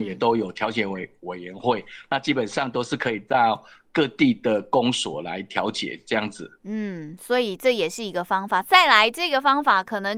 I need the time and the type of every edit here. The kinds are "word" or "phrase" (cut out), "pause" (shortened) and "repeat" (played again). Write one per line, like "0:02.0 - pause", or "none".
0:06.6 - pause